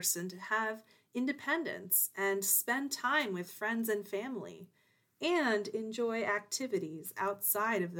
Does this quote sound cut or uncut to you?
uncut